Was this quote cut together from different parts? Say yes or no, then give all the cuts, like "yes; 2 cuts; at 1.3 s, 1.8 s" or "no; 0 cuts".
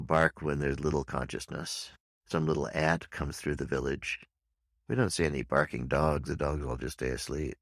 no; 0 cuts